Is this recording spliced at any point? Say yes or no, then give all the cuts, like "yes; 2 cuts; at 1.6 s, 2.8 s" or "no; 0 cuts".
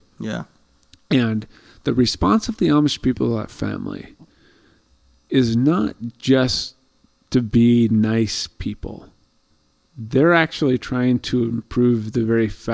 no; 0 cuts